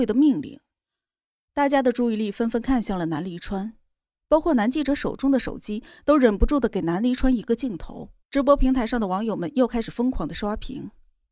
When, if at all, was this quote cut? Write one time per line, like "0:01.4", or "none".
0:08.2